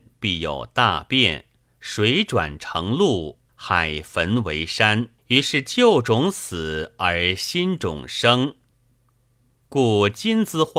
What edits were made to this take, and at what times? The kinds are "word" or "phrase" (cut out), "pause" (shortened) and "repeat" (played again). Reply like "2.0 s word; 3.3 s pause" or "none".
1.7 s pause; 3.5 s pause; 5.2 s pause